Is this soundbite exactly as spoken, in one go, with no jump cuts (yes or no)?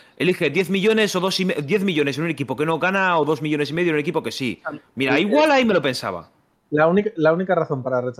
yes